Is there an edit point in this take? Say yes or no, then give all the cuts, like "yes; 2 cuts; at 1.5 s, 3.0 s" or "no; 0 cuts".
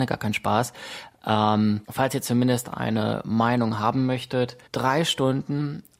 yes; 2 cuts; at 1.8 s, 4.7 s